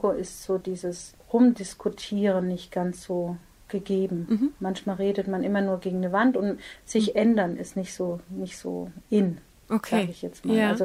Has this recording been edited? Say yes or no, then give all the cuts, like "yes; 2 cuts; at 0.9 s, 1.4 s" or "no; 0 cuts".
no; 0 cuts